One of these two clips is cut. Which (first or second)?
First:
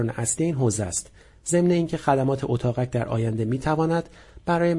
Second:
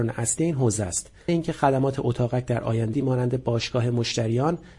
second